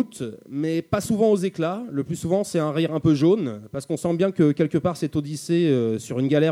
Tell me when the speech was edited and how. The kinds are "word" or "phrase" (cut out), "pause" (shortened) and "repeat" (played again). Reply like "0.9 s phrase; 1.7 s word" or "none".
none